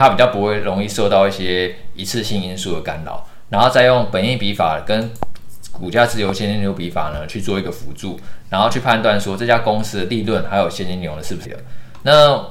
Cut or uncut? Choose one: cut